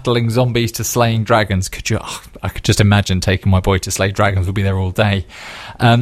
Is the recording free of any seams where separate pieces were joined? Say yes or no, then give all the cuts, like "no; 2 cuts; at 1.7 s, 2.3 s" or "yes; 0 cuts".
yes; 0 cuts